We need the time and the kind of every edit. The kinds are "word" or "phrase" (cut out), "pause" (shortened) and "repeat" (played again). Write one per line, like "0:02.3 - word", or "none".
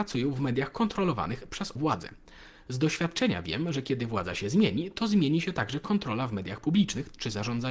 0:01.8 - word